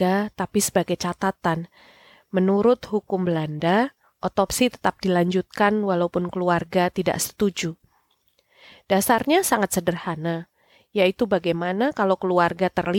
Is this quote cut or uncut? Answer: uncut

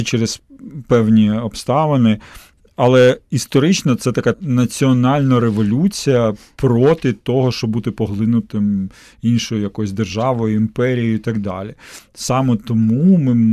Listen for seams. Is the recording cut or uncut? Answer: cut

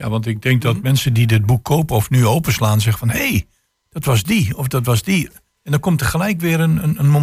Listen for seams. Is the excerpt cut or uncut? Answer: uncut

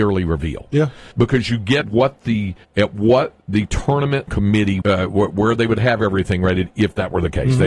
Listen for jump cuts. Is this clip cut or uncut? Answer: cut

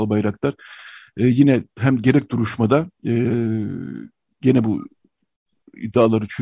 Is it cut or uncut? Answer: uncut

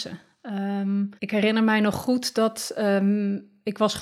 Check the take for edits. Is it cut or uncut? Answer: cut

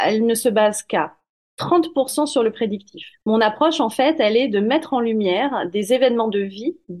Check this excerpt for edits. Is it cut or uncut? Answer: cut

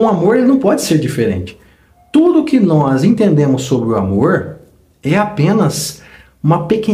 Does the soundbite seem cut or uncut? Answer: uncut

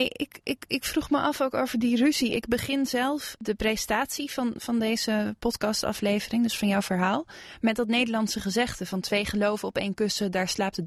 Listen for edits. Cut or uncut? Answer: uncut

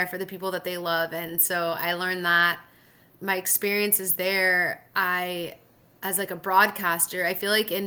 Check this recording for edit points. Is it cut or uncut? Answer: cut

